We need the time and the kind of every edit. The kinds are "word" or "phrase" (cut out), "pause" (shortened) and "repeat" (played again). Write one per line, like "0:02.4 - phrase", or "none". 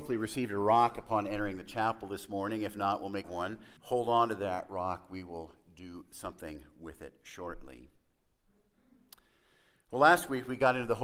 0:03.2 - phrase
0:03.8 - pause